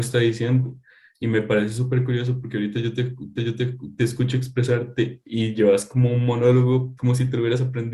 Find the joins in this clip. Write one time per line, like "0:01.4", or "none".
0:03.4
0:07.0